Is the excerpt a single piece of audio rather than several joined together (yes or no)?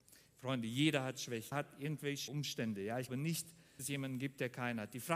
no